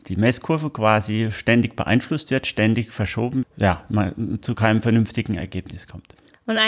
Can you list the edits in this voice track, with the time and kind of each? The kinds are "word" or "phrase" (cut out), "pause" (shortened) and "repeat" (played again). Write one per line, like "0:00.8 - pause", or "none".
0:03.4 - phrase